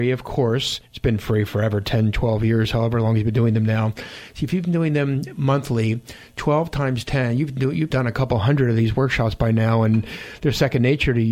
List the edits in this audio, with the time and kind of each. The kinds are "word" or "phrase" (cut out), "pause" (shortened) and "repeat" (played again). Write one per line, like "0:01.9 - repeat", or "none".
0:07.9 - word